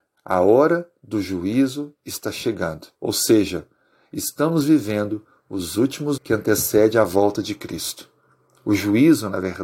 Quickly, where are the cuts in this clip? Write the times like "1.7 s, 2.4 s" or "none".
2.9 s, 6.2 s